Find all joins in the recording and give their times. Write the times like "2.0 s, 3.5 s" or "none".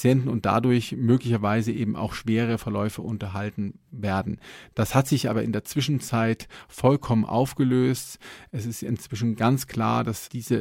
none